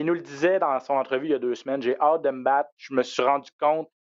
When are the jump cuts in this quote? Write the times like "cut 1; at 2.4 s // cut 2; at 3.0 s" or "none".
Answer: none